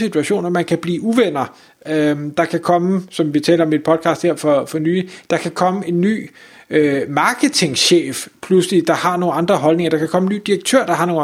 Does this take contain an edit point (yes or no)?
no